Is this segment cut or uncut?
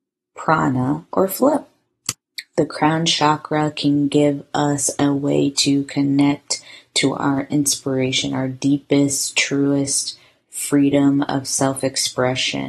uncut